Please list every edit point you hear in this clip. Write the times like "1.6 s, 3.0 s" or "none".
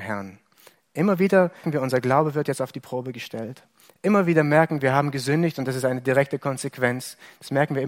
1.6 s, 4.8 s

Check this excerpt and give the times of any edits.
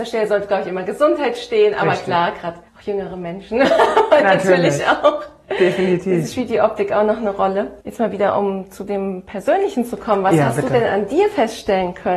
2.7 s, 7.8 s

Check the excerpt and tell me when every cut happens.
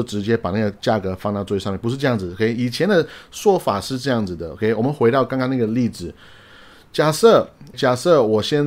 7.7 s

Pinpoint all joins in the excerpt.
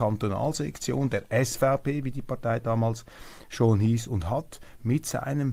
none

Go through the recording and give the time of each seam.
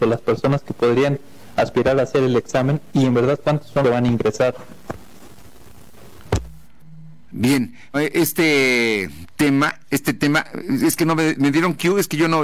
3.8 s, 7.9 s

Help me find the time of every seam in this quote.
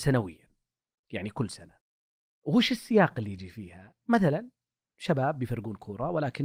none

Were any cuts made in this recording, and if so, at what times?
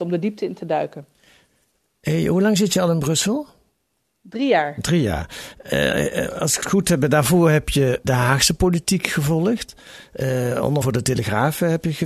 6.6 s, 8.0 s, 10.8 s

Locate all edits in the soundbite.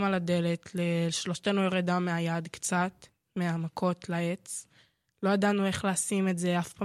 none

